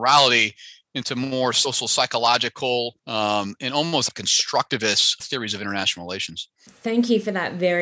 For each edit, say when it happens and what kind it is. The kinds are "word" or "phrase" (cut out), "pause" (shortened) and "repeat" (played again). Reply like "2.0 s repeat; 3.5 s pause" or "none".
3.0 s pause; 4.1 s phrase; 5.2 s word; 6.6 s pause